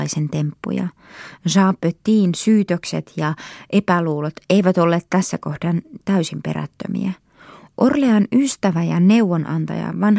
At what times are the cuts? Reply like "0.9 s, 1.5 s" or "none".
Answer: none